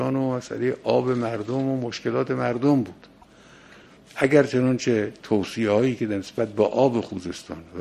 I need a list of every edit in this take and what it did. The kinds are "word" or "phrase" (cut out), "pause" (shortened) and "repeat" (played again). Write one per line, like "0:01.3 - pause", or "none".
none